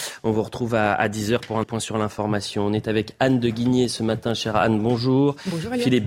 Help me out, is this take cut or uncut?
cut